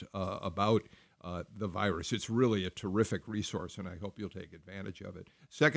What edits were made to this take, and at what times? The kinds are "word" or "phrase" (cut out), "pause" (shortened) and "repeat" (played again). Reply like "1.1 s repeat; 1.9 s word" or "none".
none